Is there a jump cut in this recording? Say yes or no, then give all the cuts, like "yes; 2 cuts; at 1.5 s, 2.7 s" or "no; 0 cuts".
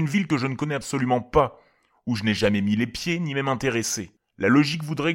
no; 0 cuts